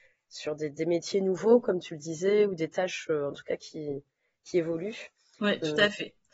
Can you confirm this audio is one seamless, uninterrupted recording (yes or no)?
yes